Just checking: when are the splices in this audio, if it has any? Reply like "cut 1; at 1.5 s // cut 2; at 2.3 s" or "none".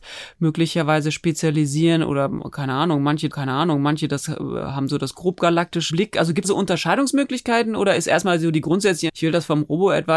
cut 1; at 3.3 s // cut 2; at 5.9 s // cut 3; at 6.4 s // cut 4; at 9.1 s

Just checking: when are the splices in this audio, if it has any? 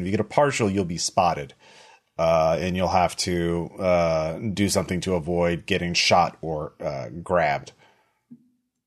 none

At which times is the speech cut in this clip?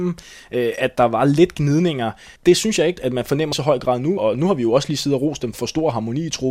cut 1; at 0.9 s // cut 2; at 2.4 s // cut 3; at 3.0 s // cut 4; at 3.5 s // cut 5; at 4.2 s // cut 6; at 5.5 s

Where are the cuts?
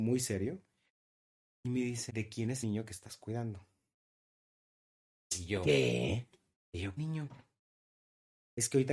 cut 1; at 2.1 s // cut 2; at 2.6 s // cut 3; at 7.0 s

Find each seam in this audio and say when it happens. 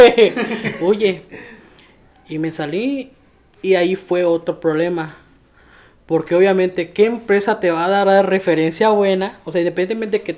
none

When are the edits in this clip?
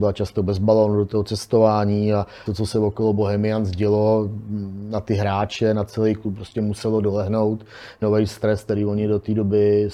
cut 1; at 2.5 s // cut 2; at 8.0 s

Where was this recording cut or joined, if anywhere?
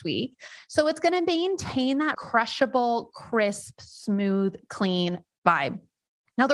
cut 1; at 2.1 s

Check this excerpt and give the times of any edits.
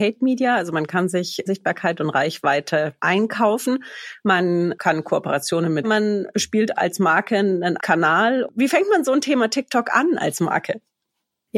cut 1; at 5.8 s // cut 2; at 6.8 s // cut 3; at 7.8 s

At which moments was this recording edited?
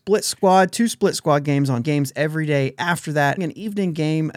cut 1; at 1.8 s // cut 2; at 3.4 s

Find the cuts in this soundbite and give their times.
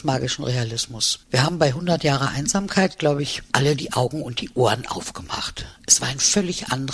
cut 1; at 1.2 s

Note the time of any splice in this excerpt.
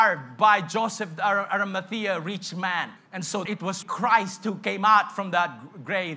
cut 1; at 3.0 s // cut 2; at 3.4 s // cut 3; at 3.8 s

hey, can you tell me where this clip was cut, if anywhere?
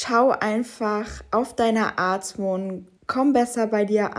cut 1; at 3.0 s

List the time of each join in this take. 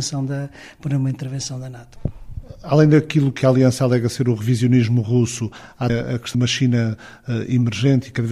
cut 1; at 3.4 s // cut 2; at 5.9 s // cut 3; at 6.3 s

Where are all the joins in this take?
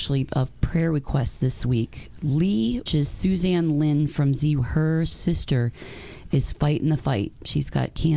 cut 1; at 2.9 s // cut 2; at 4.6 s

